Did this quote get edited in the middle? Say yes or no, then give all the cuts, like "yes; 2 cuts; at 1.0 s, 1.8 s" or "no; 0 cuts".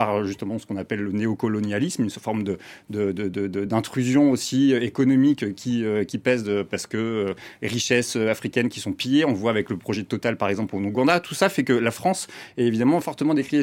no; 0 cuts